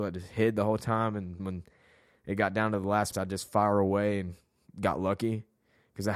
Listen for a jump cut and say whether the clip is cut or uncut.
cut